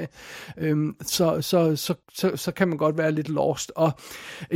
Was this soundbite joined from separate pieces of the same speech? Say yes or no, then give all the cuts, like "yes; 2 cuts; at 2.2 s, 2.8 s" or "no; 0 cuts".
yes; 1 cut; at 2.0 s